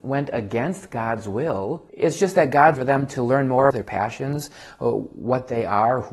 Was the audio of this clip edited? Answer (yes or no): yes